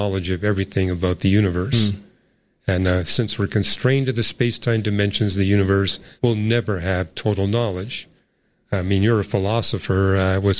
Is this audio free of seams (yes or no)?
no